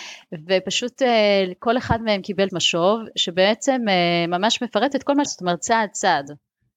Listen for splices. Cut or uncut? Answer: cut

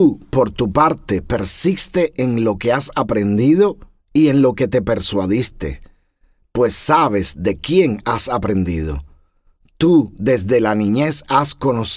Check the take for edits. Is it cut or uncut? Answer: uncut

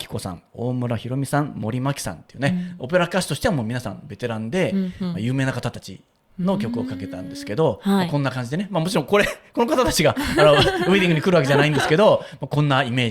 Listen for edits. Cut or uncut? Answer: uncut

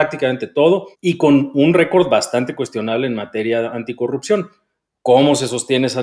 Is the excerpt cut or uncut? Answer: cut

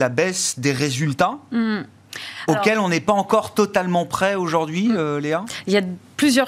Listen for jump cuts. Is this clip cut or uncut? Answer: uncut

